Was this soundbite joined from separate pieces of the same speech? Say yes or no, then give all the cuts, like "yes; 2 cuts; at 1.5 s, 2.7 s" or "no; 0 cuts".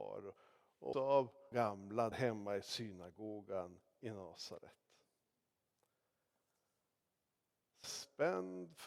yes; 4 cuts; at 0.9 s, 1.5 s, 2.1 s, 7.8 s